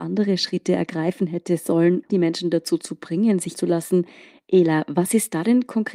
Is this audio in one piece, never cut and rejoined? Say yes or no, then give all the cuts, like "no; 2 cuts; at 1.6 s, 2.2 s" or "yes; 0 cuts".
no; 2 cuts; at 2.1 s, 3.5 s